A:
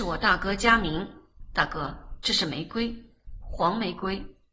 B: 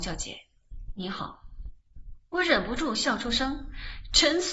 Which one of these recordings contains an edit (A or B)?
B